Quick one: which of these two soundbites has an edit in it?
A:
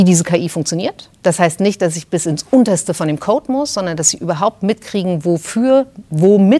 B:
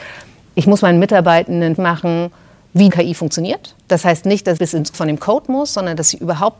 B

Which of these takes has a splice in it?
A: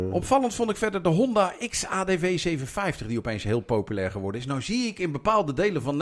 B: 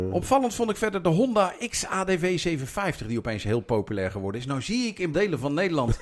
B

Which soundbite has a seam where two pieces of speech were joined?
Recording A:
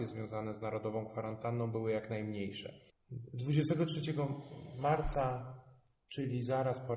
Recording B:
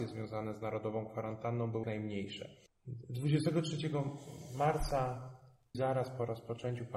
B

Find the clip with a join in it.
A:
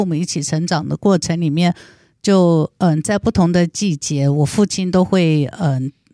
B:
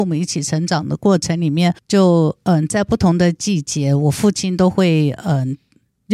B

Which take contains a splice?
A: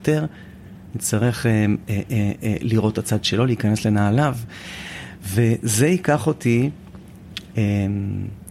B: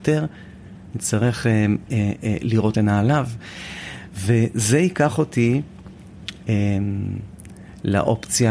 B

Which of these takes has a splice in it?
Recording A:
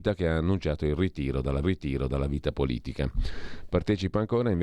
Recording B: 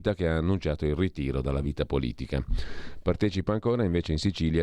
A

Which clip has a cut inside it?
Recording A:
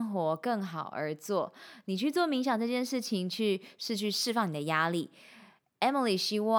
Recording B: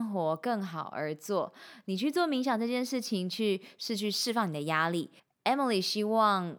B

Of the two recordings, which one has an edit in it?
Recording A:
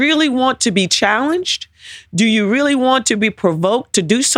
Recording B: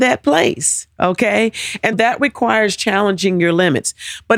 B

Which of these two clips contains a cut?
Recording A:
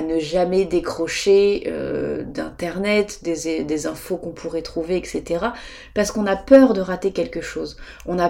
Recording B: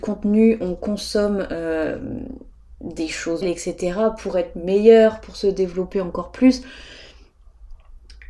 B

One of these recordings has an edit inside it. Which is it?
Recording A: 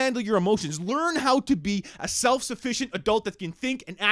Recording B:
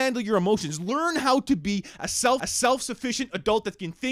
B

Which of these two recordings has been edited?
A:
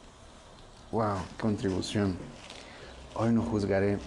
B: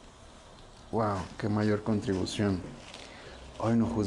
A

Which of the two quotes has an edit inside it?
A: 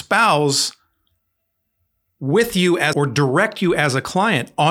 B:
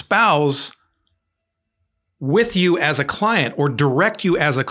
A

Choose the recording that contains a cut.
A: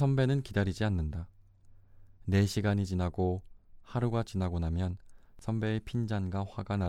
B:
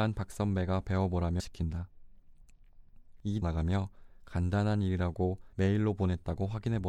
B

